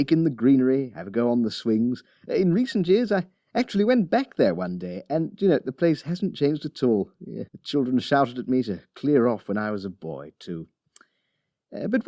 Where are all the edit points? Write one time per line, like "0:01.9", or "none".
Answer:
0:07.5